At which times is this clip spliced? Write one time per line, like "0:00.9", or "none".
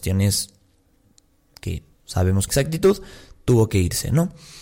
0:01.9
0:02.5